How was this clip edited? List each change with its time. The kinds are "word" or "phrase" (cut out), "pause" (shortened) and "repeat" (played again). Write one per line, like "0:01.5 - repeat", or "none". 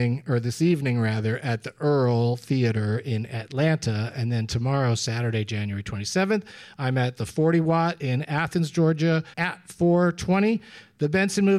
0:09.3 - pause